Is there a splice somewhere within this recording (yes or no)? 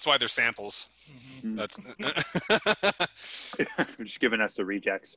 no